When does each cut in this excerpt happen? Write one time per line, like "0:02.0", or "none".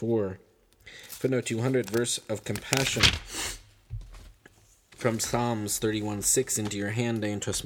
none